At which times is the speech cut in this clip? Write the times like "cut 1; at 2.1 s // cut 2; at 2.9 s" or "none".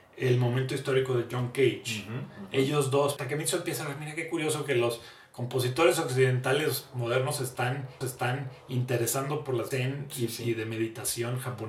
cut 1; at 3.2 s // cut 2; at 8.0 s // cut 3; at 9.7 s